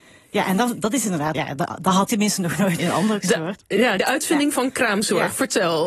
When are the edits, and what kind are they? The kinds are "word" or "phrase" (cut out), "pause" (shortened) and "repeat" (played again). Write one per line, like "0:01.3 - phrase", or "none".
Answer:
0:01.3 - word
0:02.1 - word
0:02.8 - word
0:03.2 - word
0:04.0 - word